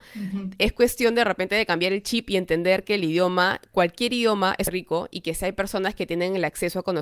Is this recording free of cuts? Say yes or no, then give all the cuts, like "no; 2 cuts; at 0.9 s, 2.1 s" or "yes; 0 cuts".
yes; 0 cuts